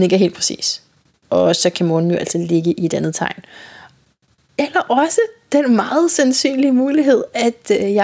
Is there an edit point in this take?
no; 0 cuts

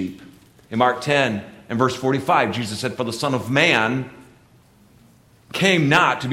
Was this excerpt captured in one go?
yes; 0 cuts

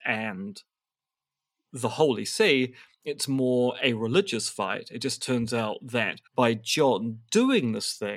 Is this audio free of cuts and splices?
no; 1 cut; at 6.3 s

